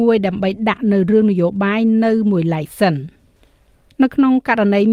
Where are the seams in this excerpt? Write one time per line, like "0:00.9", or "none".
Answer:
0:03.4